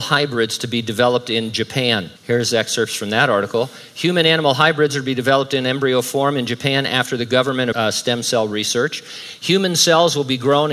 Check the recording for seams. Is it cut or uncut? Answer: cut